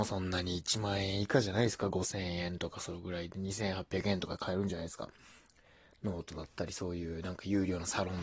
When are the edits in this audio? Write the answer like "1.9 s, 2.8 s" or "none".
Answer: none